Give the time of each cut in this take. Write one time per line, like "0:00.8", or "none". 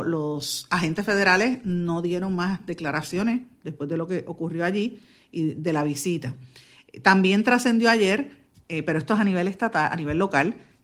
none